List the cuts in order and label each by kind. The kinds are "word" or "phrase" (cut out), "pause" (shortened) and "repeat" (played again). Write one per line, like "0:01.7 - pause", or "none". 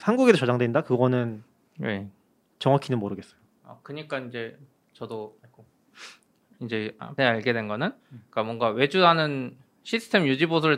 0:05.4 - pause
0:07.2 - phrase
0:08.0 - pause